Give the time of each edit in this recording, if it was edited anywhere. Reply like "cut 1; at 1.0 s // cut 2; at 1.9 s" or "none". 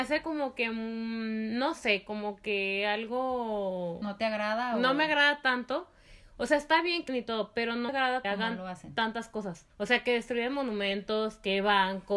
cut 1; at 7.1 s // cut 2; at 7.9 s // cut 3; at 8.2 s // cut 4; at 9.7 s